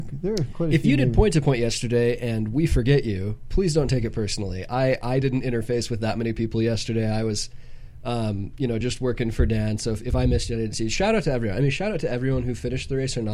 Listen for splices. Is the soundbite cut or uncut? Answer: uncut